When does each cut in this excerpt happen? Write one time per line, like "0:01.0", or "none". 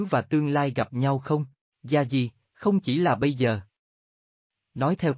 none